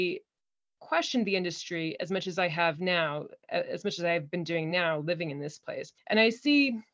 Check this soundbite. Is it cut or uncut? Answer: uncut